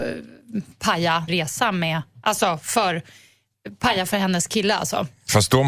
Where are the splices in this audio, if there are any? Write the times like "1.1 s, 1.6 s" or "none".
1.3 s